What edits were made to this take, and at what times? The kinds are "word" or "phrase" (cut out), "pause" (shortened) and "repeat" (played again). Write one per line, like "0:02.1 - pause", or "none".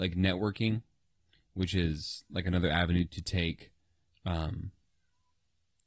none

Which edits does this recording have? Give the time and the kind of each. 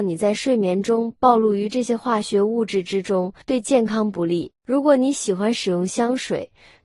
0:03.4 - pause

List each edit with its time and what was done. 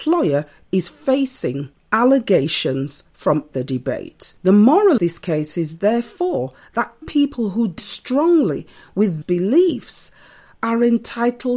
0:03.5 - phrase
0:04.4 - pause
0:05.0 - word
0:07.0 - word
0:07.8 - word
0:09.2 - phrase

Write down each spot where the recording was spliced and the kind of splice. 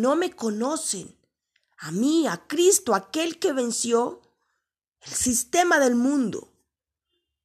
none

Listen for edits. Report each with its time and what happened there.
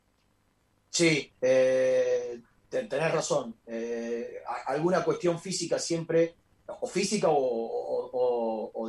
0:01.3 - pause
0:06.4 - pause

